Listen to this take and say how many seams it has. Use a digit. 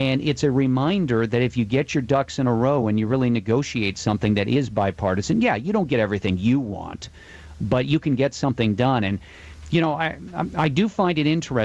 0